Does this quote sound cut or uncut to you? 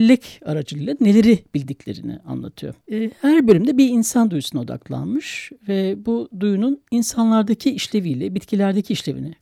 cut